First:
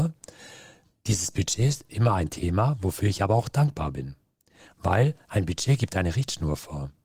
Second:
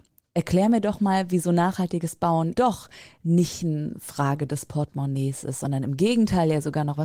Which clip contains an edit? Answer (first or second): second